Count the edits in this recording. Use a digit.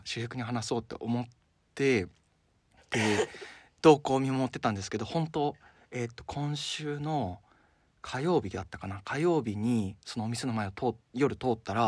0